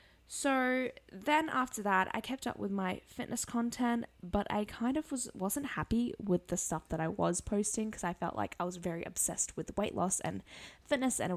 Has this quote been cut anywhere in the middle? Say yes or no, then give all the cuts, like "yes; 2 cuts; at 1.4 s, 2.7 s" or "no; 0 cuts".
no; 0 cuts